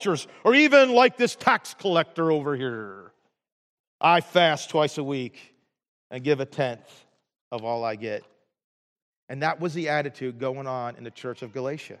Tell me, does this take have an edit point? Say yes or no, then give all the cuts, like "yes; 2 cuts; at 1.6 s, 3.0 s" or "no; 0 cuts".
no; 0 cuts